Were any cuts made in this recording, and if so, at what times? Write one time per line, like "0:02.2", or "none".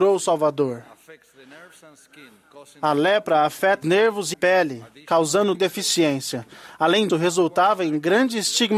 0:03.8
0:04.3
0:05.5
0:07.1